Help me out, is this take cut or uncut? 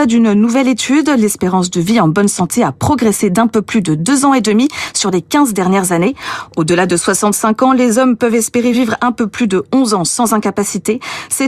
uncut